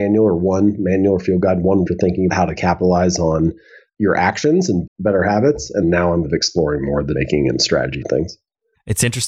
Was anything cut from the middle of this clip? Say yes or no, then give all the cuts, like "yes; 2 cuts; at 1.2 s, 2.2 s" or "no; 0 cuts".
yes; 7 cuts; at 1.9 s, 2.3 s, 4.9 s, 5.8 s, 6.2 s, 7.1 s, 8.0 s